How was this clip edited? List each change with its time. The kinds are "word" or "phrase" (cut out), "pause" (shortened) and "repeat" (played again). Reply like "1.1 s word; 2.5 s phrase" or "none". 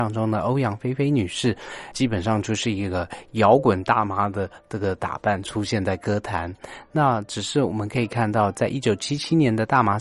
1.9 s word